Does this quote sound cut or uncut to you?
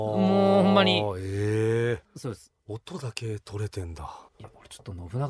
cut